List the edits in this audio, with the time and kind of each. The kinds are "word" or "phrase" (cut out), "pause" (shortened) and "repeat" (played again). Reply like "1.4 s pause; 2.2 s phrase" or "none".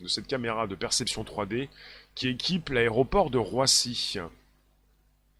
none

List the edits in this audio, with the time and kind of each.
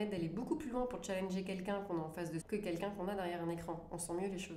2.4 s word

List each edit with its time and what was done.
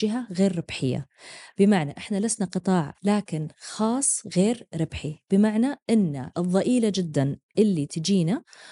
2.9 s word; 6.3 s word

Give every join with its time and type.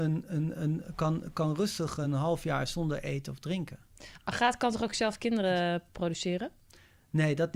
none

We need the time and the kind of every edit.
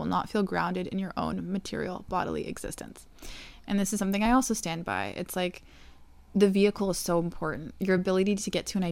none

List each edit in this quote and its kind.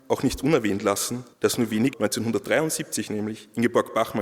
1.3 s pause; 1.9 s phrase

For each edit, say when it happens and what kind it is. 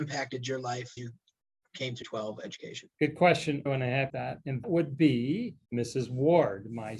1.0 s word; 2.0 s phrase; 2.9 s pause; 3.7 s word; 4.1 s phrase; 4.6 s word; 5.6 s pause

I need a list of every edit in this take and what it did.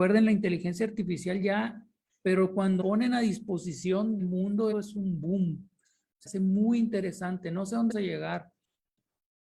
2.1 s word; 2.8 s word; 4.2 s word; 4.7 s word; 6.3 s word; 7.9 s word

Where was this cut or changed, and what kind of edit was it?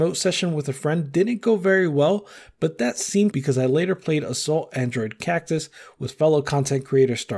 3.3 s phrase

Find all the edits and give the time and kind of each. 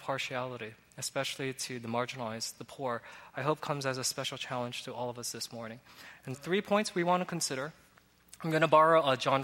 6.3 s word

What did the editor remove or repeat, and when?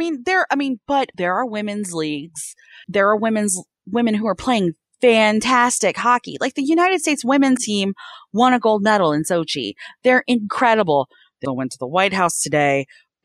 1.1 s word; 2.8 s word; 7.6 s word; 11.4 s word

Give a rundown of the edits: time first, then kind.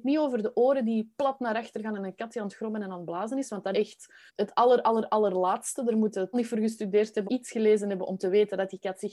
3.7 s word; 4.3 s pause; 6.3 s word; 7.3 s word

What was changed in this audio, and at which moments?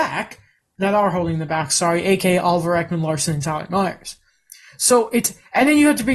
none

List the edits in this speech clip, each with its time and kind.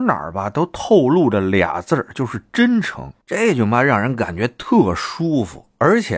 3.2 s pause

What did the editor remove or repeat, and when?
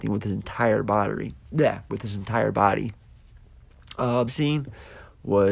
4.3 s word

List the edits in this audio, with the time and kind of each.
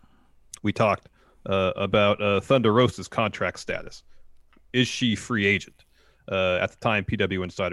none

